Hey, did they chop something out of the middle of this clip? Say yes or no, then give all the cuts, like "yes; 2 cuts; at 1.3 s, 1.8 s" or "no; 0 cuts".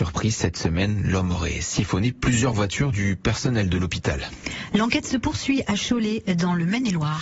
no; 0 cuts